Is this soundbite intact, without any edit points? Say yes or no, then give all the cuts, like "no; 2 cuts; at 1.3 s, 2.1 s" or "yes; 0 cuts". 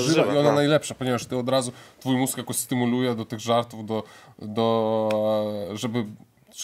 yes; 0 cuts